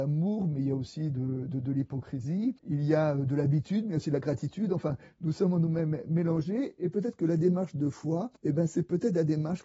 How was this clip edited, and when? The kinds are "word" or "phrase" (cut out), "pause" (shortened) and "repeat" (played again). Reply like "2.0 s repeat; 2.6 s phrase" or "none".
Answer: 2.6 s pause; 8.4 s pause